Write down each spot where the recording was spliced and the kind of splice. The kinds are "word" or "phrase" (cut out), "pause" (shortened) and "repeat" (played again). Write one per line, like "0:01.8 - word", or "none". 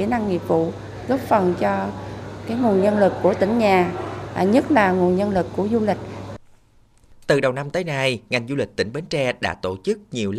none